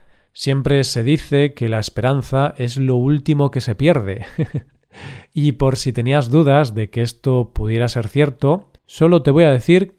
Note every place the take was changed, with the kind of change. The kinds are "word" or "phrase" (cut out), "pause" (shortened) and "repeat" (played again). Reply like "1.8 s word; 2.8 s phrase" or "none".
8.8 s pause

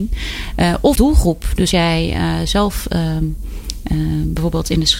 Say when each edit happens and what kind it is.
0.9 s phrase; 1.7 s word

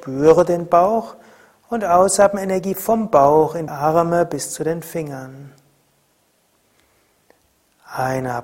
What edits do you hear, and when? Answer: 3.7 s word

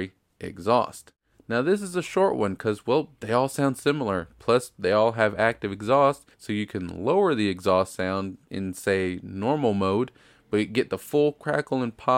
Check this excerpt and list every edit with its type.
6.3 s pause

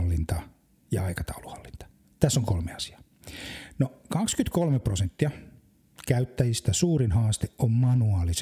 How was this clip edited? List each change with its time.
none

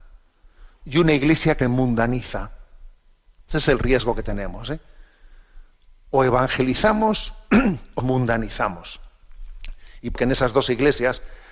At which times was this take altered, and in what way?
1.6 s word; 8.0 s word; 10.2 s word

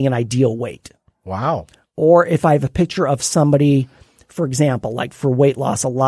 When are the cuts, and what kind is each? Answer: none

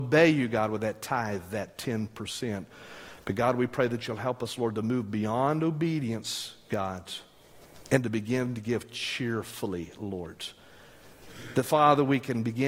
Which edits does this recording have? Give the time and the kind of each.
none

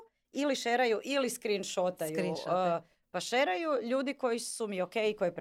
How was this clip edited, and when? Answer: none

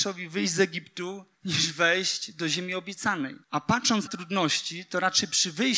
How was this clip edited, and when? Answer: 1.3 s pause; 3.4 s pause; 4.1 s word

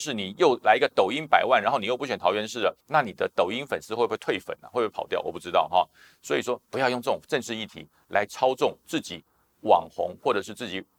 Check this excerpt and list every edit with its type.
2.8 s pause

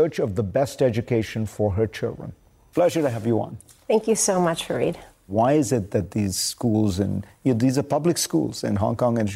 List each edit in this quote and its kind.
none

